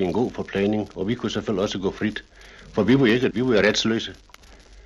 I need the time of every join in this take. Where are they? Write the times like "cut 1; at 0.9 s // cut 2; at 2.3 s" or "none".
cut 1; at 3.3 s